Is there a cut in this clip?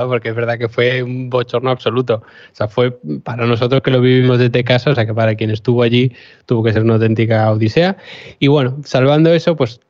no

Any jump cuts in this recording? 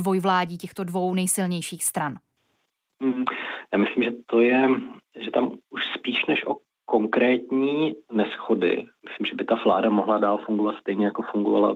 no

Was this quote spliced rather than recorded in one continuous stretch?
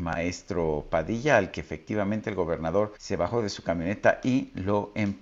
yes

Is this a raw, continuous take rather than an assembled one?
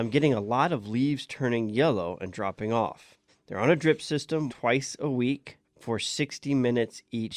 no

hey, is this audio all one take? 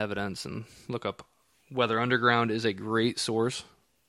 yes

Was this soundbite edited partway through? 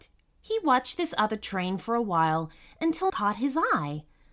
yes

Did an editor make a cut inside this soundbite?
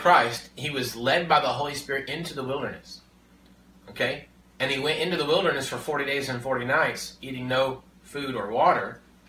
no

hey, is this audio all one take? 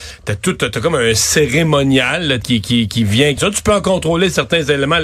no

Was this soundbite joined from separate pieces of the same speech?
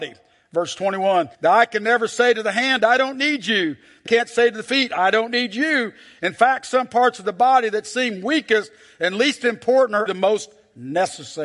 yes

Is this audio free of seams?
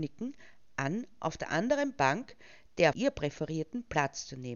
no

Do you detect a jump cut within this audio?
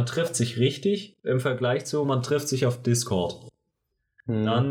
no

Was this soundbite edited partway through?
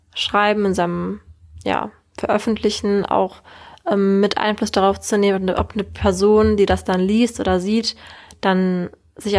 no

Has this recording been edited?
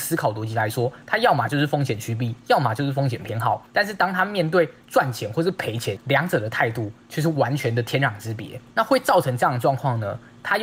yes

